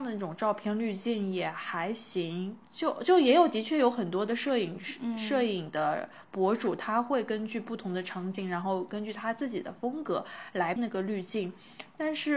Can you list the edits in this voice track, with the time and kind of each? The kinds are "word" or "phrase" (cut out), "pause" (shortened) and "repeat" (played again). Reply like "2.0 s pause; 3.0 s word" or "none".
2.6 s pause; 10.8 s word